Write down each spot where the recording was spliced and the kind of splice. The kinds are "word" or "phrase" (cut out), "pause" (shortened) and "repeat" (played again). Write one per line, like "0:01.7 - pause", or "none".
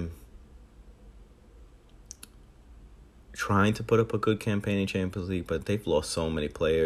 none